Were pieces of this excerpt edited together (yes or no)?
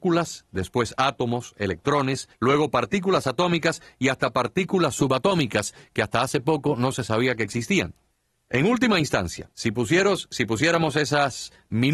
yes